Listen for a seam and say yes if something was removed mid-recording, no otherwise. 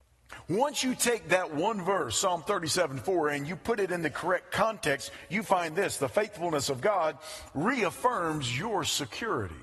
no